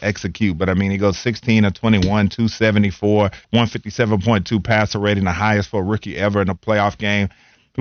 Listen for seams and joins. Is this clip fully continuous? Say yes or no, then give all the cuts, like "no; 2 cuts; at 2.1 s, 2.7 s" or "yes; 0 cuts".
no; 1 cut; at 3.4 s